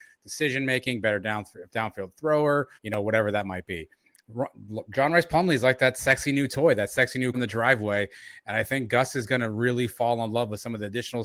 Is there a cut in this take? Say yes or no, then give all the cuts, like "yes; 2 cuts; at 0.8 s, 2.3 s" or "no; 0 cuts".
yes; 2 cuts; at 2.8 s, 7.3 s